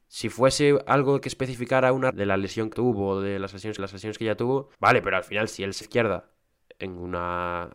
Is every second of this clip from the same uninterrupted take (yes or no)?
no